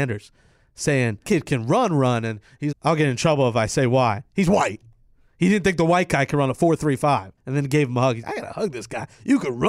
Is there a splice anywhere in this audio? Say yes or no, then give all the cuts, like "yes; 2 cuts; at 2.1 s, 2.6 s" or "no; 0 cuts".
yes; 4 cuts; at 1.2 s, 2.7 s, 7.4 s, 8.2 s